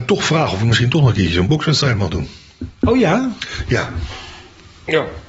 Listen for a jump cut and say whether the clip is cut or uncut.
uncut